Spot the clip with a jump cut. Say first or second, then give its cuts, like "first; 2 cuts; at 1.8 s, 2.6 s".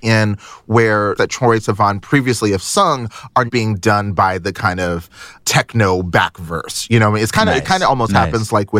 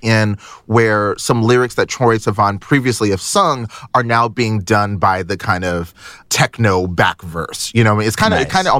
first; 2 cuts; at 1.2 s, 3.5 s